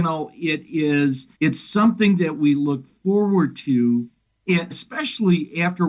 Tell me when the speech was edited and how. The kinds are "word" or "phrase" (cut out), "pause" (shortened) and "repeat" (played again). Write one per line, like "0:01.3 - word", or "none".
0:01.4 - pause
0:04.7 - word